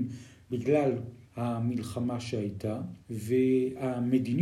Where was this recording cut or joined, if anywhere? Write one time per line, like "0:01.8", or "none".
0:01.3
0:03.0